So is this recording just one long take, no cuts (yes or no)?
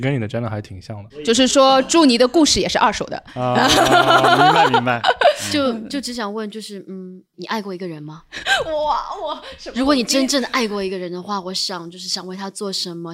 yes